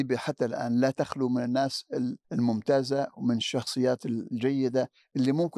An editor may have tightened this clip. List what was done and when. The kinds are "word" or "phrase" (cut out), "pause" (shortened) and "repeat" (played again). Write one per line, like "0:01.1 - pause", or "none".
0:02.2 - pause